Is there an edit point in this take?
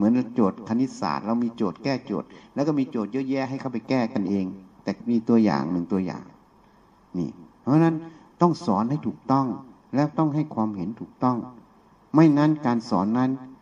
no; 0 cuts

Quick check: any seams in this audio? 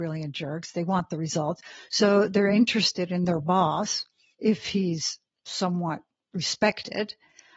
no; 0 cuts

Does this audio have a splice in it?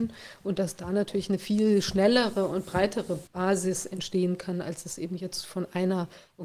yes; 1 cut; at 3.3 s

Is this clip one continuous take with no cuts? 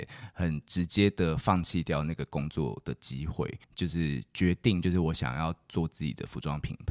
no; 1 cut; at 3.6 s

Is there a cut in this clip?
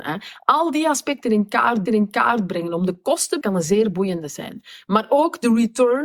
yes; 2 cuts; at 1.9 s, 3.4 s

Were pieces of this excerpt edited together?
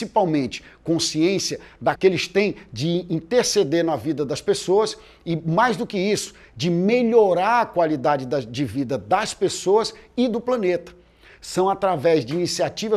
yes; 1 cut; at 2.0 s

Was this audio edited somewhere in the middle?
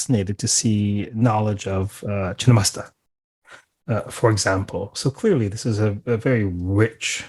no; 0 cuts

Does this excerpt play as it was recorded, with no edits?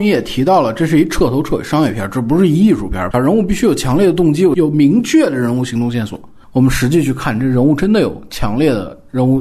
yes; 0 cuts

